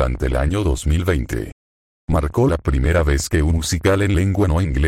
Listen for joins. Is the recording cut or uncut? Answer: cut